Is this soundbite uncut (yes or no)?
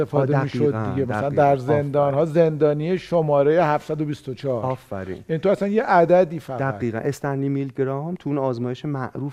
yes